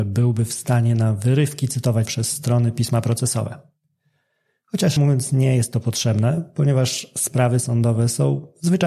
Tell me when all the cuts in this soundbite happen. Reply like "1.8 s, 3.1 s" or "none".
2.1 s, 5.0 s